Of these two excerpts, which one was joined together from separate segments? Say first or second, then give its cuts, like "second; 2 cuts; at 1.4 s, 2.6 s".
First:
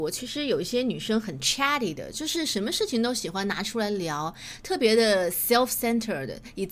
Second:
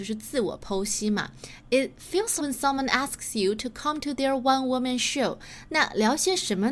second; 1 cut; at 2.4 s